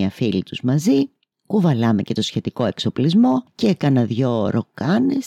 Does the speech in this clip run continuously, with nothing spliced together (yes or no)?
yes